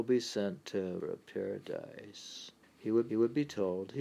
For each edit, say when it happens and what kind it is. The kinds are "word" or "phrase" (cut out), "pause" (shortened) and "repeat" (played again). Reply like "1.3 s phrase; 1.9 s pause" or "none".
1.0 s phrase; 2.6 s pause; 3.1 s repeat

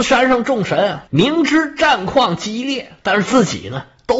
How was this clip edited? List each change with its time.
1.1 s pause; 3.0 s pause

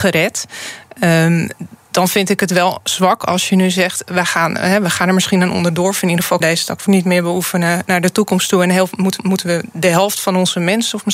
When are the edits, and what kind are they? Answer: 6.4 s word; 6.9 s word; 9.2 s repeat

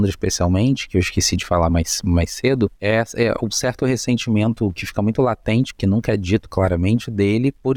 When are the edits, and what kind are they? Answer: none

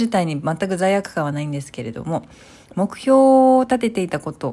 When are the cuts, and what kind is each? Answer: none

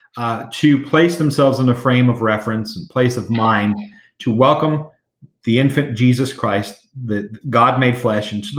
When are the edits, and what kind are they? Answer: none

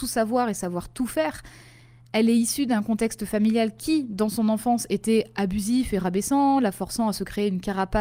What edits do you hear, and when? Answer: none

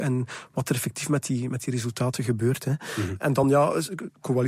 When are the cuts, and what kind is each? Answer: none

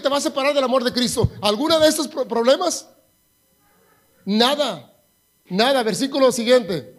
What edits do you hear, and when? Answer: none

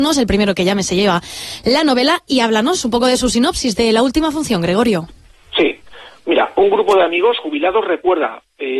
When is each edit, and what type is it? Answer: none

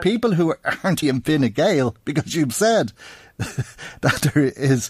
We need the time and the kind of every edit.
1.0 s word

